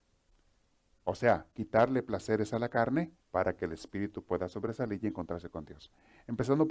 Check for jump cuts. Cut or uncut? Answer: cut